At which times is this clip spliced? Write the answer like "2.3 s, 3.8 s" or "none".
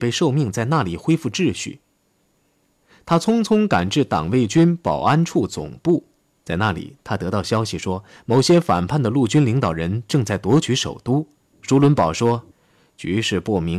11.4 s, 12.5 s